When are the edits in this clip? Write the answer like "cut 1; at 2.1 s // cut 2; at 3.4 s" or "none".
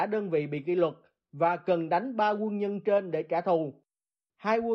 none